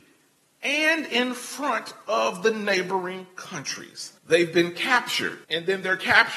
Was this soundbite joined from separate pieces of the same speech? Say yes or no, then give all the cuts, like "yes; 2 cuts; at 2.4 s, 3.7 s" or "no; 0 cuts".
yes; 2 cuts; at 4.2 s, 5.4 s